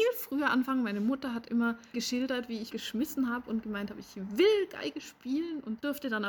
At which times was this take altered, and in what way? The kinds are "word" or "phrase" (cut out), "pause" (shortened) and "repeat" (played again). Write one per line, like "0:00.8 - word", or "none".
0:01.9 - word
0:02.7 - phrase